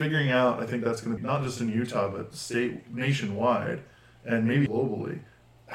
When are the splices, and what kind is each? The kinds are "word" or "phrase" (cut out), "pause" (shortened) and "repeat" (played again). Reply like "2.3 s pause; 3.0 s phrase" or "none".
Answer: 1.2 s word; 4.7 s word